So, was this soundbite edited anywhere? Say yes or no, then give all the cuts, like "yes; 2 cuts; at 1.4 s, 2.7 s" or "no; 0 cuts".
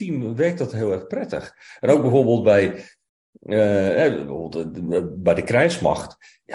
no; 0 cuts